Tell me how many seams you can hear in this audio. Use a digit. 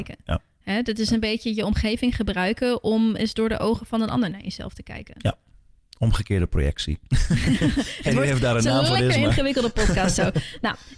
0